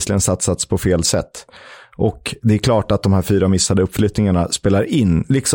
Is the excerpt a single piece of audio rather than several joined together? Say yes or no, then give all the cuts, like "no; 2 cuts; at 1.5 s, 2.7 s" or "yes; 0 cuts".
yes; 0 cuts